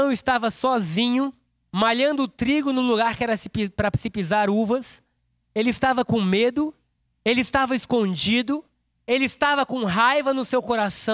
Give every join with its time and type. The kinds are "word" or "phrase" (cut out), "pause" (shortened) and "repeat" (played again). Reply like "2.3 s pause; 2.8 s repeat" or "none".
none